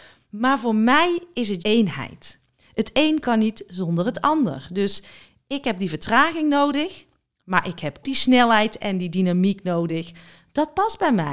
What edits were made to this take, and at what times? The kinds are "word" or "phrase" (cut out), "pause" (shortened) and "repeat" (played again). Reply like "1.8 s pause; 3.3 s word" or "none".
1.6 s word; 8.0 s word